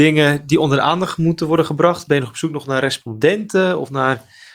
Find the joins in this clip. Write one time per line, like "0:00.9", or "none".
none